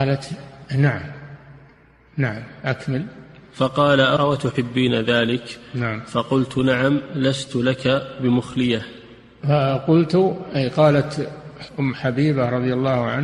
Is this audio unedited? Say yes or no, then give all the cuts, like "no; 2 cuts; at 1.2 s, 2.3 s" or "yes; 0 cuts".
yes; 0 cuts